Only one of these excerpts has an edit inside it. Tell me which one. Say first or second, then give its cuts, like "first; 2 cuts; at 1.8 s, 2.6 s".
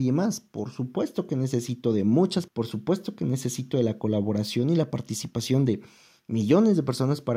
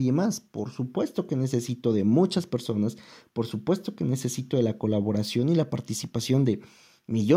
first; 1 cut; at 2.5 s